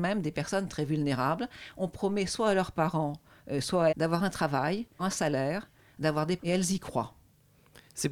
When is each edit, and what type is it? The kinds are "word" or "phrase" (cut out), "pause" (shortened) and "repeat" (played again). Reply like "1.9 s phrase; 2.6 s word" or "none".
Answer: 3.9 s word; 5.0 s word; 6.4 s word